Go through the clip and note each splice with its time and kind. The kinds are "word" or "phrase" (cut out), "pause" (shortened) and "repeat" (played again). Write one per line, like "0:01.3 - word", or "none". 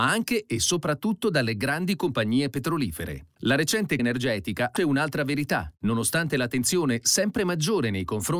0:04.0 - word
0:04.8 - phrase